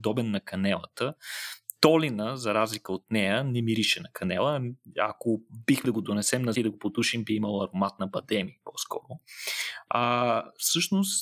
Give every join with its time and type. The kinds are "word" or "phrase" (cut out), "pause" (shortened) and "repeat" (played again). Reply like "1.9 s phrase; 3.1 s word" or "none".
5.8 s word; 6.5 s word

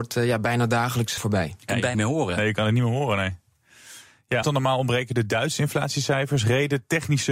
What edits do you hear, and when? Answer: 1.2 s word; 1.9 s word; 4.4 s word

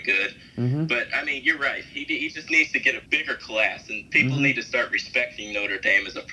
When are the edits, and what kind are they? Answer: 3.1 s pause

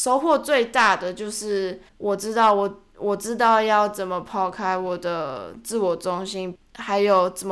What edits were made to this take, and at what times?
1.9 s pause

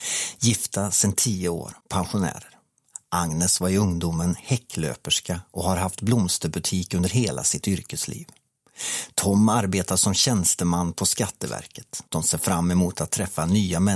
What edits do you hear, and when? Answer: 1.8 s pause; 12.1 s pause

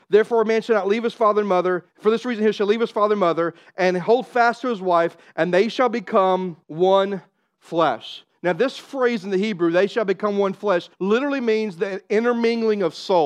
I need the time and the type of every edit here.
1.9 s pause; 6.6 s pause; 10.9 s pause

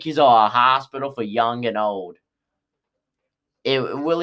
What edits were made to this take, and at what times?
none

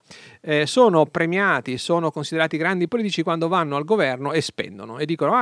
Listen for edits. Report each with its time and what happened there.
none

